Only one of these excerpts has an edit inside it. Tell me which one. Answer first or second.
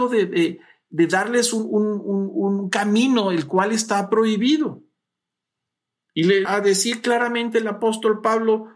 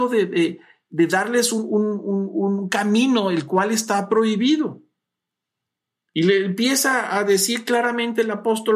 first